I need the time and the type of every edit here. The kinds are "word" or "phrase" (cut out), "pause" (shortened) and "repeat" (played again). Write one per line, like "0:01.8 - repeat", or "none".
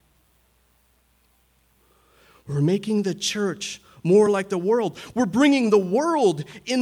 none